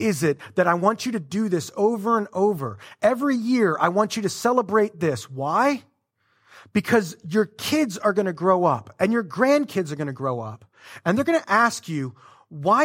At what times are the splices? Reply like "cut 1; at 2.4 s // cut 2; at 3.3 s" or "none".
none